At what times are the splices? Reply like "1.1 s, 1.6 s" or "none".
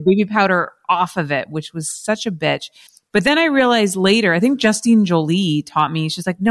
2.9 s